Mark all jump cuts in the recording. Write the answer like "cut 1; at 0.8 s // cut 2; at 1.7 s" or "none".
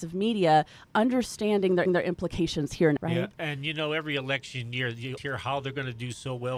cut 1; at 1.9 s // cut 2; at 3.0 s // cut 3; at 5.2 s